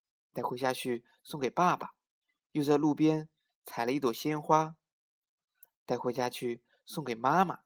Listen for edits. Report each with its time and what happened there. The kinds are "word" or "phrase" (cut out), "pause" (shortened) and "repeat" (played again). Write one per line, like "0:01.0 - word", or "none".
0:02.2 - pause